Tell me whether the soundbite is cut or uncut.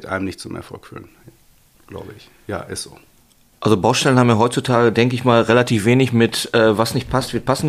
uncut